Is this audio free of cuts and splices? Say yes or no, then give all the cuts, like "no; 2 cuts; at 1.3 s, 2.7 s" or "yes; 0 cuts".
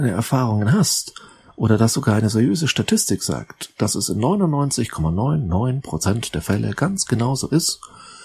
yes; 0 cuts